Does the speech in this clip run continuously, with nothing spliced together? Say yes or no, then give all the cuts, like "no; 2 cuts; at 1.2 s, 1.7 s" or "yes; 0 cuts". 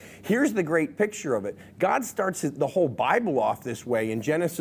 yes; 0 cuts